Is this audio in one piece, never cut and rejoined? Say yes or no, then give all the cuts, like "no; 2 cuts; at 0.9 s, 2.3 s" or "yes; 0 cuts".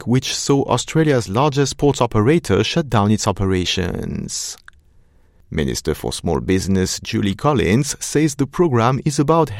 yes; 0 cuts